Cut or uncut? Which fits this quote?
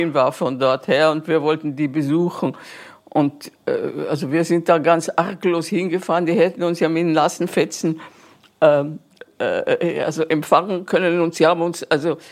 uncut